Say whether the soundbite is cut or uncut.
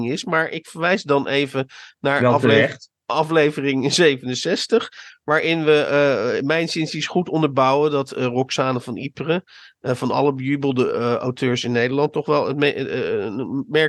uncut